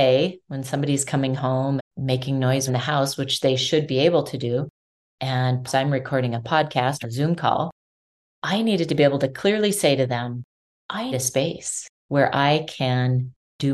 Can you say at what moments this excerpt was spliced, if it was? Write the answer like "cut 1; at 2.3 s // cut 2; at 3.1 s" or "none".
cut 1; at 1.8 s // cut 2; at 2.7 s // cut 3; at 5.7 s // cut 4; at 7.0 s // cut 5; at 11.1 s